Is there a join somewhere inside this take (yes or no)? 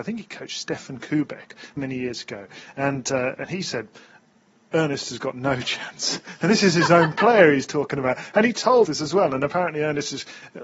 yes